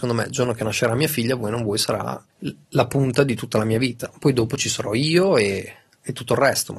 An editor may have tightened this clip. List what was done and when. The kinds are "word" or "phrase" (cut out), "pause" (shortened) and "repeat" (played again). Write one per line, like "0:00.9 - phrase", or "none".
0:02.3 - pause